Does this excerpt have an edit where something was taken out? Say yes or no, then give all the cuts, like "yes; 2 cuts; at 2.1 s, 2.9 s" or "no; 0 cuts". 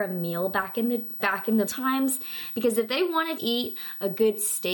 yes; 3 cuts; at 1.2 s, 1.7 s, 3.4 s